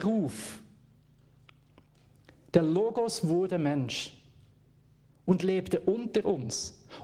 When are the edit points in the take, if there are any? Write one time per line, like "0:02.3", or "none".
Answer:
none